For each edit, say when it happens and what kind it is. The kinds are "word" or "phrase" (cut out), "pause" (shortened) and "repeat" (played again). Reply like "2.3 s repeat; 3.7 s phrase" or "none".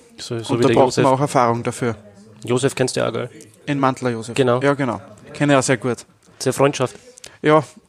none